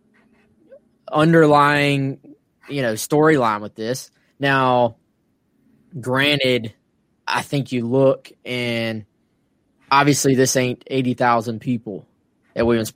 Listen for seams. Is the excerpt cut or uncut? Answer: uncut